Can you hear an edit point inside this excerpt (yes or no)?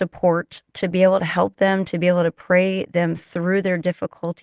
no